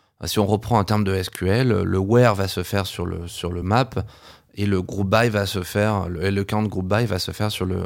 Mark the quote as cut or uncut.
uncut